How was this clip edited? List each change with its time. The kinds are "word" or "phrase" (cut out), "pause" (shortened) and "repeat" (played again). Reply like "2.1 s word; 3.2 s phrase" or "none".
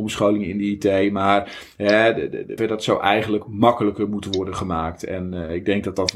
2.6 s phrase